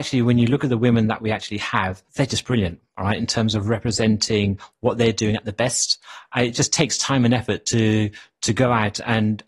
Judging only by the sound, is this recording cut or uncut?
cut